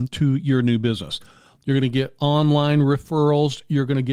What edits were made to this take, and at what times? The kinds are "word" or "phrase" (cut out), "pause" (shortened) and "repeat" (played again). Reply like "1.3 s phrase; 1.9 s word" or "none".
none